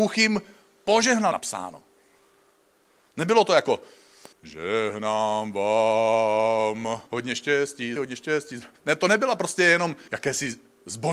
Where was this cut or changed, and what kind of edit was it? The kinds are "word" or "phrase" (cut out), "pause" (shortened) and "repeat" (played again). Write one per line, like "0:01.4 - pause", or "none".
0:01.3 - phrase
0:04.3 - pause
0:07.1 - pause
0:08.0 - word
0:08.8 - pause
0:10.1 - word